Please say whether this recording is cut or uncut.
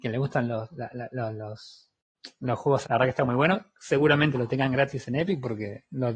cut